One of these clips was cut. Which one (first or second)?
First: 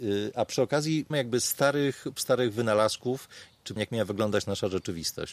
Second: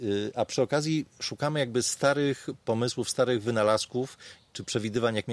first